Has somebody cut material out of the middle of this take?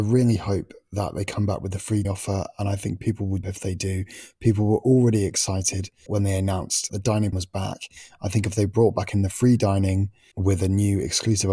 yes; 6 cuts; at 2.0 s, 3.4 s, 6.1 s, 6.9 s, 7.3 s, 10.3 s

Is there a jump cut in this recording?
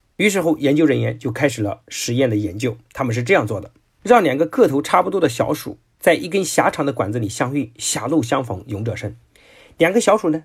no; 0 cuts

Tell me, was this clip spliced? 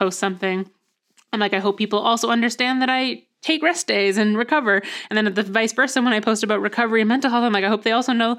no; 0 cuts

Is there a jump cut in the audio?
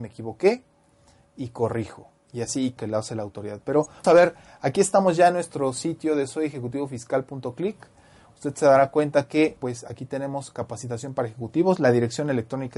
yes; 3 cuts; at 2.8 s, 4.0 s, 9.6 s

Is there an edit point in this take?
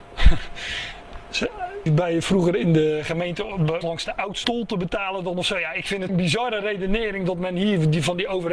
yes; 4 cuts; at 1.9 s, 3.8 s, 4.4 s, 6.1 s

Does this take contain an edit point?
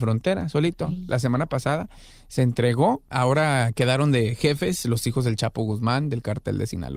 no; 0 cuts

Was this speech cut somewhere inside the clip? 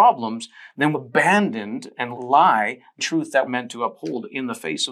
yes; 4 cuts; at 0.9 s, 2.1 s, 3.0 s, 3.5 s

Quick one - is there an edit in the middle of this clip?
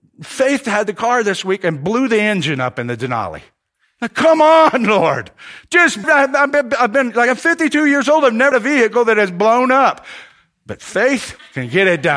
yes; 2 cuts; at 6.0 s, 8.5 s

